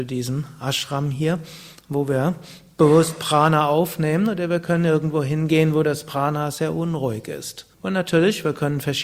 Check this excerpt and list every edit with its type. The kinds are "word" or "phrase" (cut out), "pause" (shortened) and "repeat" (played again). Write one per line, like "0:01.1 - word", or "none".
0:07.7 - pause